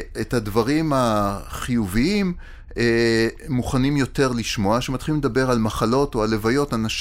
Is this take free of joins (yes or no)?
yes